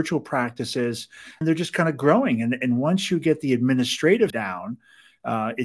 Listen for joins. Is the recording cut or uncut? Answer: cut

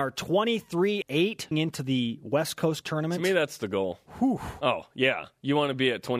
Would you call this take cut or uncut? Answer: cut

